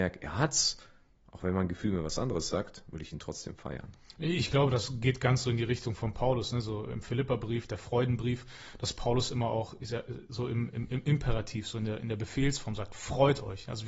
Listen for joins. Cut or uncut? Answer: uncut